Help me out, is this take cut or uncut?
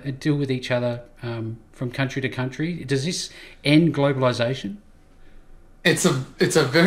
uncut